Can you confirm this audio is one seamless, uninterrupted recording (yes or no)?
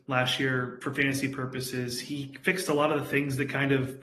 yes